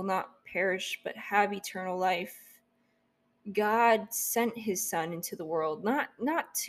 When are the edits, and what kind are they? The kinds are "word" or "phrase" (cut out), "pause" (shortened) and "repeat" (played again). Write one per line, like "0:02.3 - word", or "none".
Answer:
none